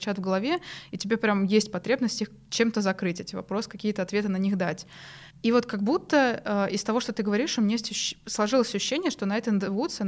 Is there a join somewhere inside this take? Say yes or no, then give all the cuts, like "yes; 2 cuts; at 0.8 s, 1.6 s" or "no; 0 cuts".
yes; 1 cut; at 5.3 s